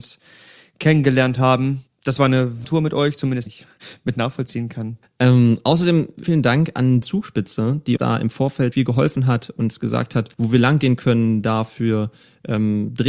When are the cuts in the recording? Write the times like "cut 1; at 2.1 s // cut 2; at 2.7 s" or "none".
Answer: cut 1; at 2.6 s // cut 2; at 3.5 s // cut 3; at 6.2 s // cut 4; at 7.0 s // cut 5; at 8.0 s // cut 6; at 8.7 s // cut 7; at 10.3 s